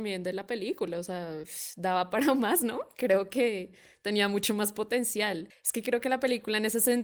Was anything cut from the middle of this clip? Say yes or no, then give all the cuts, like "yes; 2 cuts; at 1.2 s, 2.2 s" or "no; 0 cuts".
no; 0 cuts